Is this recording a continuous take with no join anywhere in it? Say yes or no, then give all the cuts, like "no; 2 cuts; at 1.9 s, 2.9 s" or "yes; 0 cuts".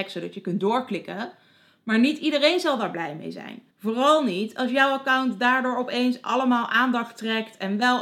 no; 1 cut; at 3.7 s